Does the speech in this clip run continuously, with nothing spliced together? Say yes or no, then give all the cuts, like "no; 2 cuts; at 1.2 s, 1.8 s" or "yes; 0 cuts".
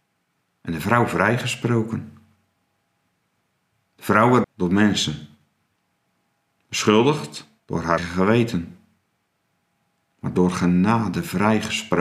no; 3 cuts; at 4.4 s, 7.6 s, 8.0 s